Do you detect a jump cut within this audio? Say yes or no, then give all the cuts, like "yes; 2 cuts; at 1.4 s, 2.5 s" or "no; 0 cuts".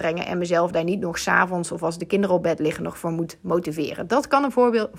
no; 0 cuts